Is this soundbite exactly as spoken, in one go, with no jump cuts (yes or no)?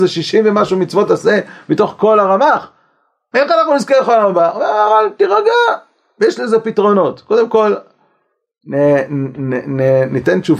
yes